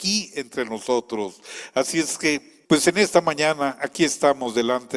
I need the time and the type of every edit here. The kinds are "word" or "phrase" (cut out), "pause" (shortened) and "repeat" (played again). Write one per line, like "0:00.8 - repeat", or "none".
0:02.6 - word